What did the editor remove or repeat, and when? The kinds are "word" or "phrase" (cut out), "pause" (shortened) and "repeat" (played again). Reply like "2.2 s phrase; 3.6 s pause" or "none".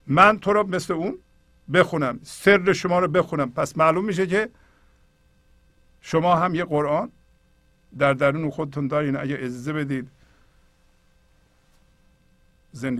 none